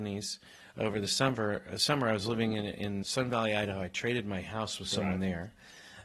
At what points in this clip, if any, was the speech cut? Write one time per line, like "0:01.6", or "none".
0:03.0

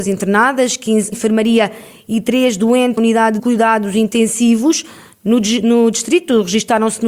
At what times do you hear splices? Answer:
0:01.1
0:03.0
0:03.4

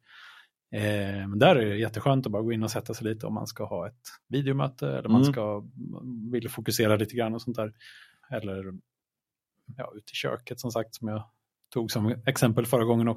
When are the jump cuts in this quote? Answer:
0:04.2

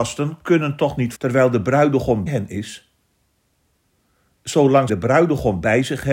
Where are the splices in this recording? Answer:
0:01.1
0:02.3
0:04.9

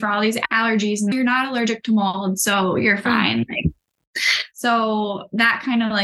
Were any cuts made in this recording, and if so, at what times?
0:01.1

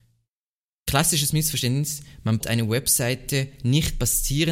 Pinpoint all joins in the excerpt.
0:02.4

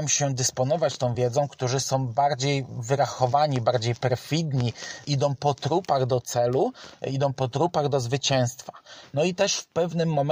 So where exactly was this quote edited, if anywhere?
none

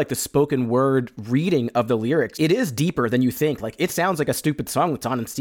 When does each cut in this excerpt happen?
none

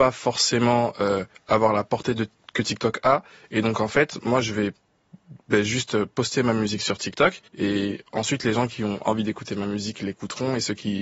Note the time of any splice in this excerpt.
0:01.4
0:05.4
0:07.5

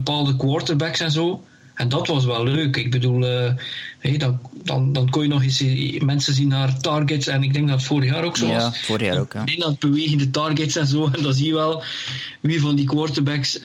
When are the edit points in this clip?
none

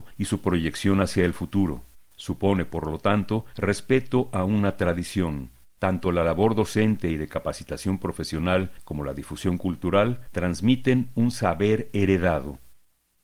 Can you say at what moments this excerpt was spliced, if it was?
0:05.7

